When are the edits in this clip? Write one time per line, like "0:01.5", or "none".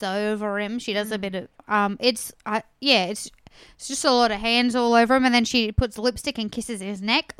none